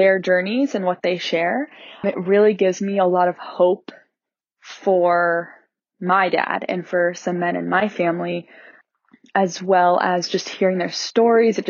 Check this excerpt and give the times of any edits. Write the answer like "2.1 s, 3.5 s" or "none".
none